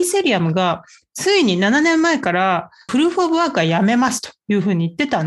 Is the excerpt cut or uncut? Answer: uncut